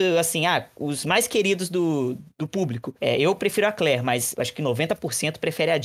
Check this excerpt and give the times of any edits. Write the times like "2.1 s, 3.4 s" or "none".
none